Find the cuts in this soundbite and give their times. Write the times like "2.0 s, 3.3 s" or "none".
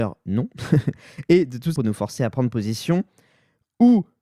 1.8 s